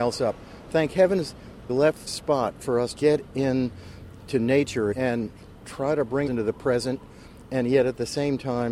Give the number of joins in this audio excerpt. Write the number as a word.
five